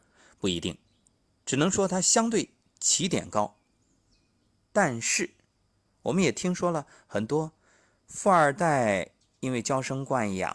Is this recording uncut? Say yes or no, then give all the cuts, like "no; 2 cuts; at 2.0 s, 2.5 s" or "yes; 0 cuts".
yes; 0 cuts